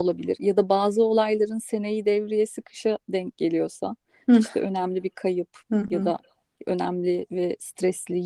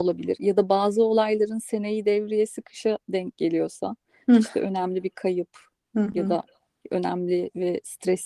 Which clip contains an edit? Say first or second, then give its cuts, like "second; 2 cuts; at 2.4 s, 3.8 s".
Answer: first; 1 cut; at 5.6 s